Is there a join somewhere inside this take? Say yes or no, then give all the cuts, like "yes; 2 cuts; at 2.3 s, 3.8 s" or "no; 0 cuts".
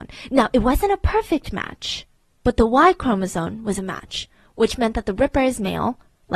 no; 0 cuts